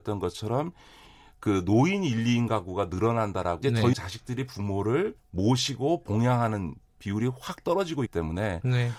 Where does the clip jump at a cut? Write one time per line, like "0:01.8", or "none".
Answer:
0:03.6
0:03.9
0:05.2
0:08.1